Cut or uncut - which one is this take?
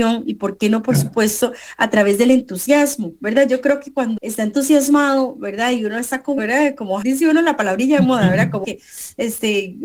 cut